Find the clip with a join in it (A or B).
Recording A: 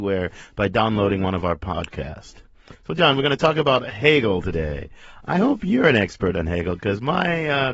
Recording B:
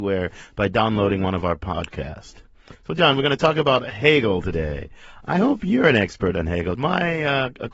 B